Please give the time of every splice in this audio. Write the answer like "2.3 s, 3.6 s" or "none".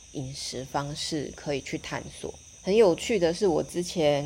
2.5 s